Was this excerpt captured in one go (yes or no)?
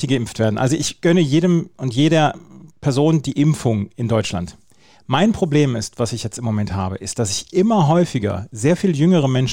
yes